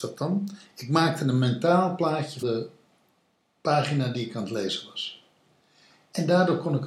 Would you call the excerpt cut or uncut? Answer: cut